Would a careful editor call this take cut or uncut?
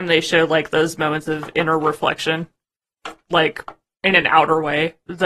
uncut